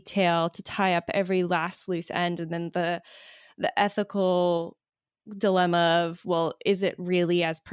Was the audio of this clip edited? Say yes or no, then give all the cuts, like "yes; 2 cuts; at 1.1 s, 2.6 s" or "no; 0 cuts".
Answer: no; 0 cuts